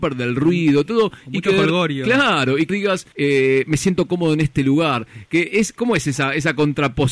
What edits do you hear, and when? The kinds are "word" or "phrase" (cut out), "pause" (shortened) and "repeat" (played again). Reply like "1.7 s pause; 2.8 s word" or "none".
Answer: 2.7 s phrase; 3.1 s pause; 5.8 s word